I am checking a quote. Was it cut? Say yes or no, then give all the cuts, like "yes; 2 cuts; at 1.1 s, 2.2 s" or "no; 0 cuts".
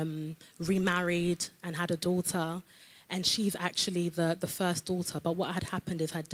no; 0 cuts